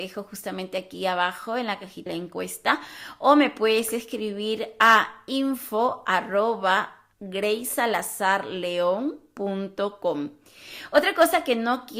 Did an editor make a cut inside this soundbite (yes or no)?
yes